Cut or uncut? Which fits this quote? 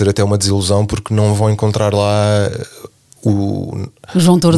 uncut